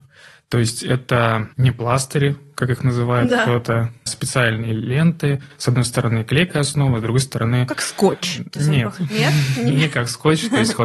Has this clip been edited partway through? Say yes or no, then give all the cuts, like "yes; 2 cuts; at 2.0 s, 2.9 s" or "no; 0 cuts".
yes; 1 cut; at 4.1 s